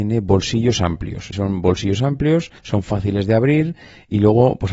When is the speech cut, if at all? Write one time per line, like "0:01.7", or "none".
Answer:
0:01.3
0:02.6

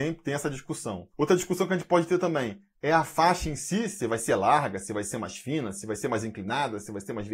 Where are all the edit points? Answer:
none

